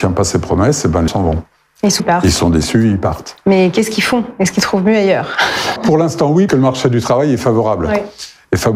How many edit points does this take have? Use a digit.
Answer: 4